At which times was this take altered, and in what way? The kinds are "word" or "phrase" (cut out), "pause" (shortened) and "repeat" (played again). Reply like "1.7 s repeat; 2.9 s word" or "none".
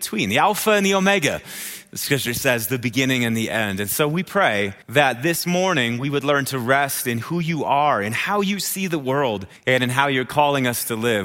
4.8 s pause; 9.6 s pause